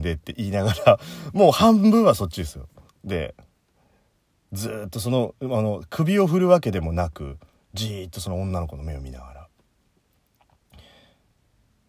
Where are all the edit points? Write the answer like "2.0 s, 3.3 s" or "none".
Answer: 2.9 s